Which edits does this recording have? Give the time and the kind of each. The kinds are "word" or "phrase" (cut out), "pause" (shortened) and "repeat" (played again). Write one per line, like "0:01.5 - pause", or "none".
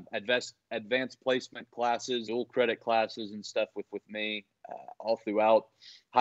0:02.3 - word
0:03.9 - repeat